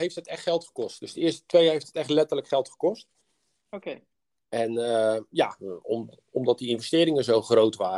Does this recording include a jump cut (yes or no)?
no